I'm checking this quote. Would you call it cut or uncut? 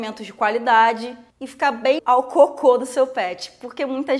cut